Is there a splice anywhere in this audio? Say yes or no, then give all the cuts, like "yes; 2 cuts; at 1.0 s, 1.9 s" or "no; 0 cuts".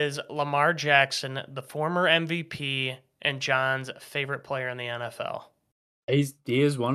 no; 0 cuts